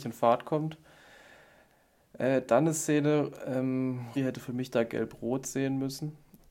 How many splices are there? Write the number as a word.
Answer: one